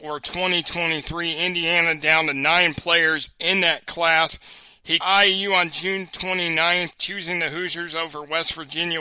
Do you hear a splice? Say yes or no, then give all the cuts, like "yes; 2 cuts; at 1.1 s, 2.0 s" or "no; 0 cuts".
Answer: yes; 1 cut; at 5.0 s